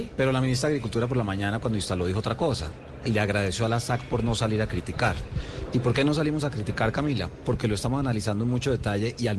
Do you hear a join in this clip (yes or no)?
no